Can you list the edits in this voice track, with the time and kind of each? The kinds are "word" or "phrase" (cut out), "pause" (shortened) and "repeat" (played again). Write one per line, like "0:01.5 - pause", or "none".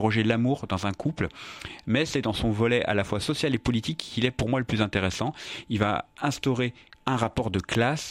none